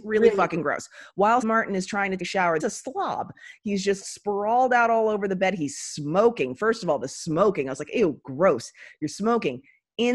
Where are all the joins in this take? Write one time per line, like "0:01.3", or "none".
0:01.4
0:02.2
0:02.6
0:04.0